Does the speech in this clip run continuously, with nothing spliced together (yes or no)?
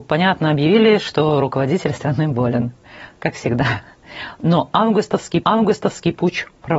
no